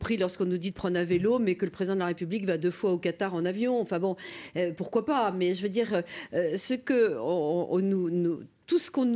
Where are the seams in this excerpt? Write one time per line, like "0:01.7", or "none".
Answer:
none